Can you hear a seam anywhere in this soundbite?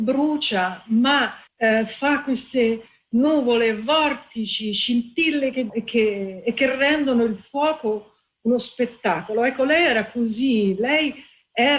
yes; 2 cuts; at 1.5 s, 5.7 s

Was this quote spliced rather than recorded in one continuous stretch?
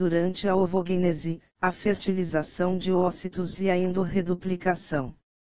yes; 1 cut; at 3.5 s

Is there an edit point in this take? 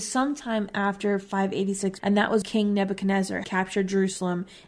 yes; 3 cuts; at 2.0 s, 2.4 s, 3.4 s

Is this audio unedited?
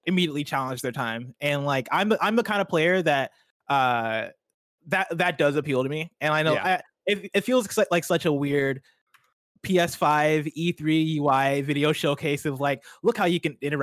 yes; 0 cuts

